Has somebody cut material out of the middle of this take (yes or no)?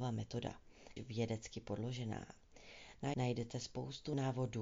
yes